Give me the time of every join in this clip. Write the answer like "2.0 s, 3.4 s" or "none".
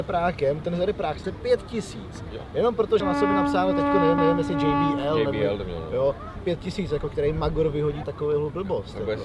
1.2 s, 3.0 s, 4.2 s, 6.4 s, 8.0 s